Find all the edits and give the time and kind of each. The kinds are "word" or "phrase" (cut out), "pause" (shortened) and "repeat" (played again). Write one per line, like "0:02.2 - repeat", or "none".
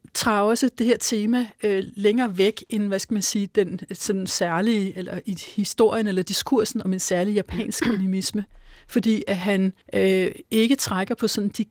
0:09.8 - pause